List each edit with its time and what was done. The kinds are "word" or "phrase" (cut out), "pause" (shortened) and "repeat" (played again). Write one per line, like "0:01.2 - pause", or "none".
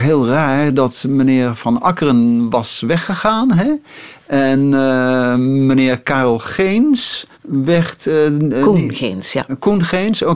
0:07.3 - pause